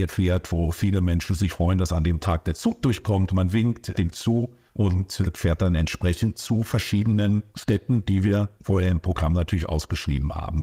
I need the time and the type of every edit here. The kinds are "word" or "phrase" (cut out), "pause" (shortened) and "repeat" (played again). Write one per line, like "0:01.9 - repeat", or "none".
0:01.5 - word
0:04.1 - word